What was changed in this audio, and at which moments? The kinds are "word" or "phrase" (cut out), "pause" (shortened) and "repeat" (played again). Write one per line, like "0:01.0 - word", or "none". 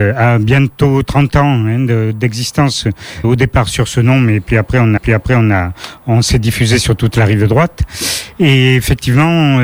0:03.2 - word
0:05.0 - repeat